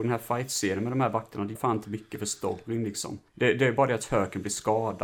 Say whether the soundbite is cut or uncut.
cut